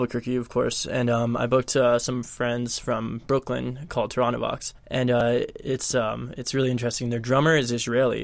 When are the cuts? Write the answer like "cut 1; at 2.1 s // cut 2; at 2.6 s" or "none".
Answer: cut 1; at 4.8 s